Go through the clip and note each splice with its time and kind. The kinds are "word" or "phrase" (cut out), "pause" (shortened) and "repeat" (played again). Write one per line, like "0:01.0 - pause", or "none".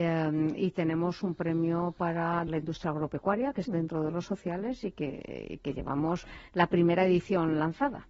0:02.5 - word
0:03.7 - phrase